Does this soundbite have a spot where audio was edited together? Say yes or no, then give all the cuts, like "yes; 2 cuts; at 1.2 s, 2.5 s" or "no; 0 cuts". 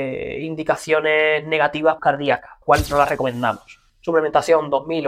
yes; 3 cuts; at 2.0 s, 2.6 s, 3.9 s